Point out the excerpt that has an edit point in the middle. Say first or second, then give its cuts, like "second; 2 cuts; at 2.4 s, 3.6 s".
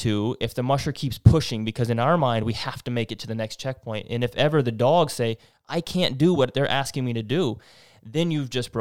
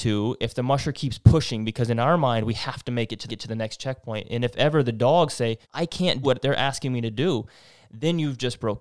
second; 3 cuts; at 3.3 s, 5.6 s, 6.2 s